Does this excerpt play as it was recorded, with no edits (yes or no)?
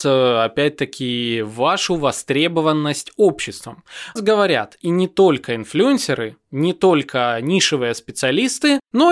no